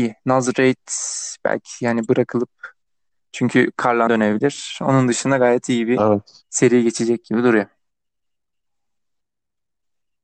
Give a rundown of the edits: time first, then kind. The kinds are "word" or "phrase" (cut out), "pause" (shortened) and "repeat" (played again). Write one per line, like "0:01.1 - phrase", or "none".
0:04.1 - word